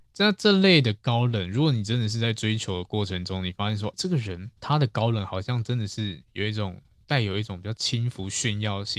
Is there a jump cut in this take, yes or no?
yes